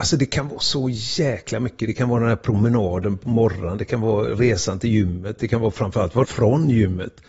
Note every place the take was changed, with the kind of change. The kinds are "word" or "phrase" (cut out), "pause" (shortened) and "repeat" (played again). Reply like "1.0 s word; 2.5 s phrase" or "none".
6.2 s word